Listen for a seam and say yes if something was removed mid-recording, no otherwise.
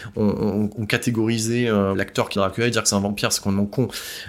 yes